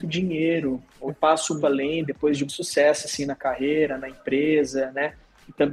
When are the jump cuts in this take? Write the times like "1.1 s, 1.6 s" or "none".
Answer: 1.1 s, 1.6 s, 2.5 s